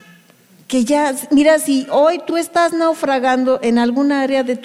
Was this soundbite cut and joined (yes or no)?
no